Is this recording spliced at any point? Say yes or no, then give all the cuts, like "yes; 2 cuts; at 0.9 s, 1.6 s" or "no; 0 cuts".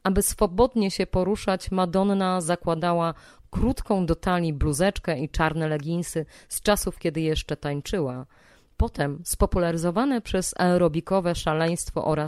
no; 0 cuts